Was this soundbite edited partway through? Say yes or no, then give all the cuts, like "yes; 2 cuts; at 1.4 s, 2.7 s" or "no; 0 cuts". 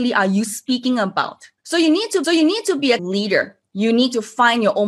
yes; 4 cuts; at 1.6 s, 2.2 s, 3.0 s, 3.7 s